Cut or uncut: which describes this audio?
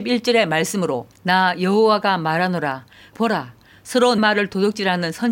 cut